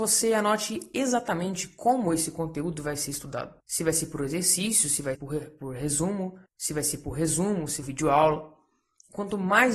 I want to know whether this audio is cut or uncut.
cut